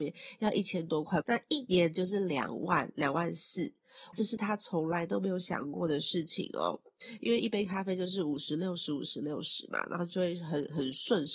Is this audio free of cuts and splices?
no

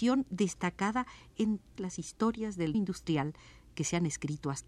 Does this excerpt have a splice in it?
yes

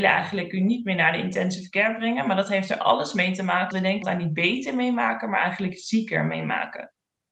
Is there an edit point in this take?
yes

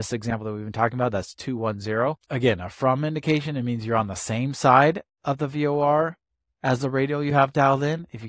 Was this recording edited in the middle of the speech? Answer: yes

